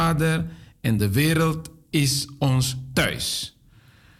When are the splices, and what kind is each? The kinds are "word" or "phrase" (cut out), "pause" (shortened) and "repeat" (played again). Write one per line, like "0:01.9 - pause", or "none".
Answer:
none